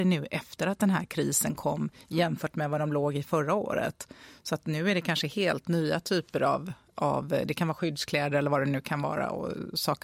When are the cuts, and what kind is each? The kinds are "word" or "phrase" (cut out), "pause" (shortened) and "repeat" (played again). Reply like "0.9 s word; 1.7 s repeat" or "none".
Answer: none